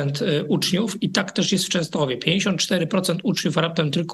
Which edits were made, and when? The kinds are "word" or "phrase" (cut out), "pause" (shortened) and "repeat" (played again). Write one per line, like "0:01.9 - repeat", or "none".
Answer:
none